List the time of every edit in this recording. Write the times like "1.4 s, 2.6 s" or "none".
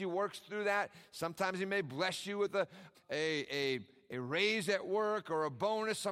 2.9 s